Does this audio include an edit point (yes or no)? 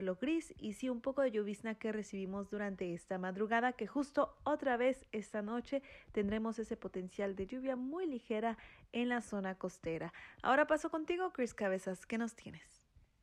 no